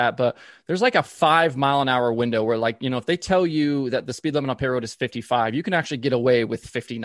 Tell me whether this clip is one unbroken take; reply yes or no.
yes